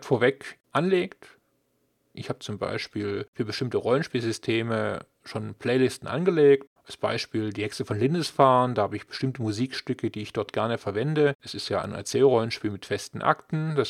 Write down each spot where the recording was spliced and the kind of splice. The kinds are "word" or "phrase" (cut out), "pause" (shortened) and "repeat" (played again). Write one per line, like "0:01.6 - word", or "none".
none